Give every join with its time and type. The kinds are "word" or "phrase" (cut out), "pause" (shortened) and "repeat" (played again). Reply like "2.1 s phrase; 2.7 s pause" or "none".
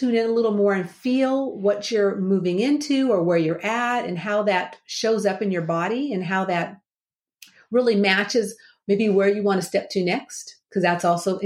none

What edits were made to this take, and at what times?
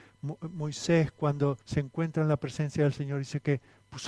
1.6 s pause

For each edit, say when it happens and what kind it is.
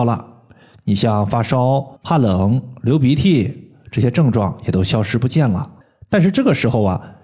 2.0 s pause; 5.8 s pause

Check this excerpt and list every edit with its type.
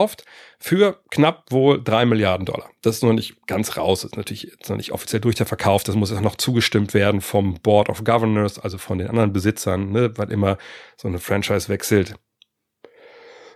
3.4 s pause

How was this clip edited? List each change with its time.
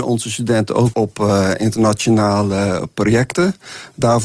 0.9 s word

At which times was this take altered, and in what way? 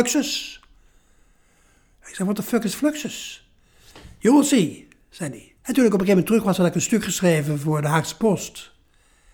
5.6 s pause

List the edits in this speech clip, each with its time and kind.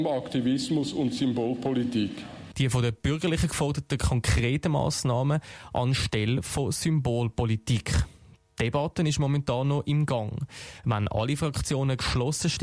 none

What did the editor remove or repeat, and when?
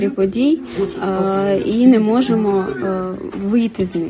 none

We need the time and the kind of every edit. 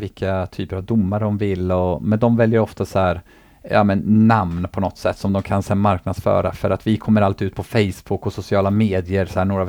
none

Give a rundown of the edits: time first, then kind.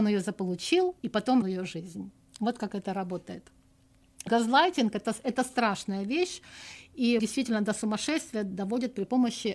1.0 s pause; 1.4 s word; 2.2 s pause; 4.3 s word; 7.2 s word

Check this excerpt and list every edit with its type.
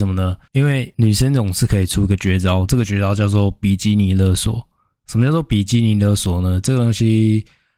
none

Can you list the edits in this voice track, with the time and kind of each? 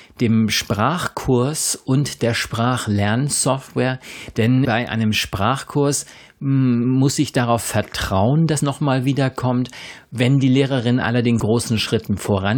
4.6 s word; 8.6 s word; 11.4 s word

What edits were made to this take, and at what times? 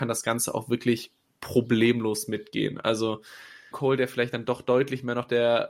3.7 s word

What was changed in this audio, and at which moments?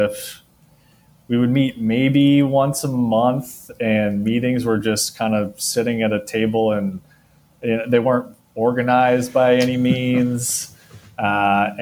none

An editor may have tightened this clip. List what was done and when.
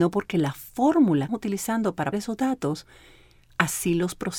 1.3 s phrase; 2.1 s word

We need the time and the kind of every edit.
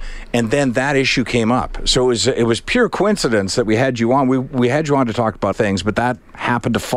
5.5 s word

